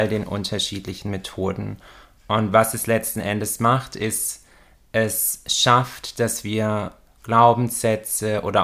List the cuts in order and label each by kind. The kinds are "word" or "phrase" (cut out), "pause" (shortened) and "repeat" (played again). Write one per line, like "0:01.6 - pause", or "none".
none